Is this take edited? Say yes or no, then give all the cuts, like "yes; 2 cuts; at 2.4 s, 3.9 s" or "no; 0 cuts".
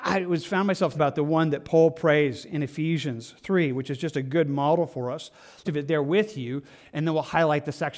yes; 2 cuts; at 0.9 s, 5.6 s